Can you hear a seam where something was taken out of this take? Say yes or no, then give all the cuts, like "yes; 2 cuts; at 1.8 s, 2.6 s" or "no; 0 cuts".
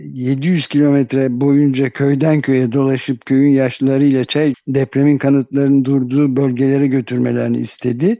yes; 1 cut; at 4.5 s